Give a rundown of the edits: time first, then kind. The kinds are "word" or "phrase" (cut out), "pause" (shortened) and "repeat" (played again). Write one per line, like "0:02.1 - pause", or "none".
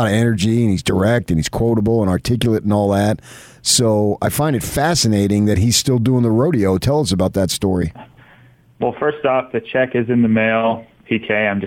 none